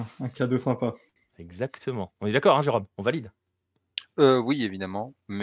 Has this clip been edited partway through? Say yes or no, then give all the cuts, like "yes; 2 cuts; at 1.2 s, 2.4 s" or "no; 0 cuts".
no; 0 cuts